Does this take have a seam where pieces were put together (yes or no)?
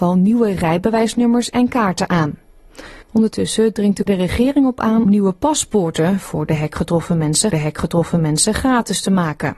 yes